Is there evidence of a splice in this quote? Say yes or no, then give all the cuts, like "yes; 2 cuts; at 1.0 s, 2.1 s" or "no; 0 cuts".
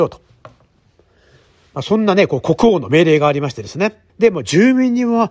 yes; 1 cut; at 4.1 s